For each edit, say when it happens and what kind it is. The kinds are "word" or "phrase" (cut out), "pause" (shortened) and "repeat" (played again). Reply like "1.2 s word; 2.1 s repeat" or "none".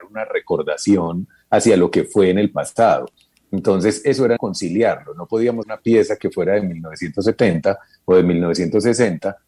4.4 s word; 5.6 s word

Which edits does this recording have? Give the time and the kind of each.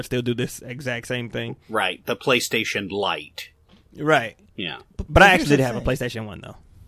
none

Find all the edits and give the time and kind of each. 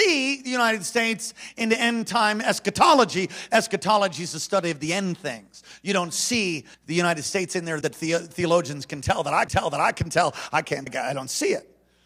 6.7 s pause; 7.8 s word; 9.5 s repeat; 10.9 s word

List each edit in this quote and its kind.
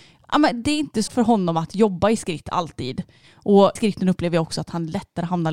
1.1 s word; 3.8 s word

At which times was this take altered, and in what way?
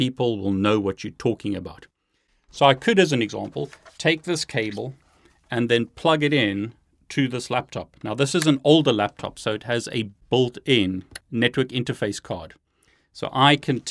none

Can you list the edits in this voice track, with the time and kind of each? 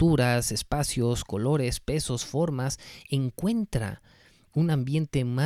none

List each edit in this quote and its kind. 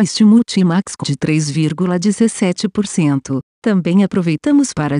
1.0 s word

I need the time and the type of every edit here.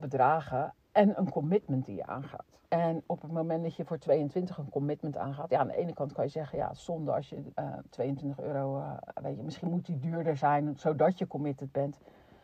2.7 s pause; 7.5 s pause

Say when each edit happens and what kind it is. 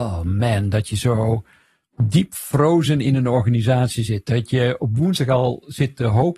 none

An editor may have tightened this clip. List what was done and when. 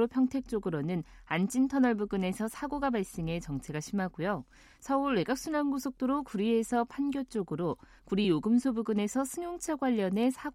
none

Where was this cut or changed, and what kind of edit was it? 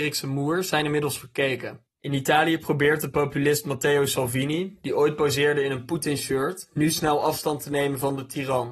1.9 s pause

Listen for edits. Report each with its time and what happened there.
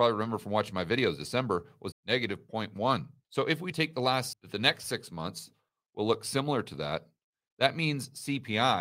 1.9 s word; 3.7 s word; 4.3 s phrase

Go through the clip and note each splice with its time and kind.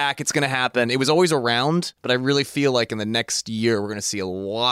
2.0 s pause

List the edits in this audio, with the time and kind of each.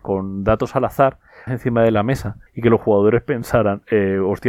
1.5 s phrase; 2.5 s pause

